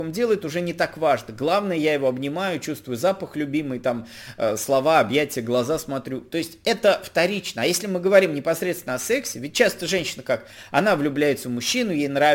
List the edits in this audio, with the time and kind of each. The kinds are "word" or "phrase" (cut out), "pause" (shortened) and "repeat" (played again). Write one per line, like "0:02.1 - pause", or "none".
none